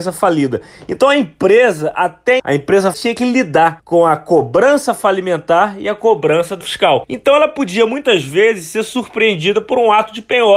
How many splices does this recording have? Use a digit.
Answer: 3